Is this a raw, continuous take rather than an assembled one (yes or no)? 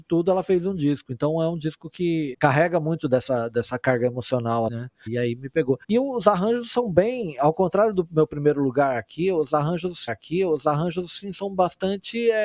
no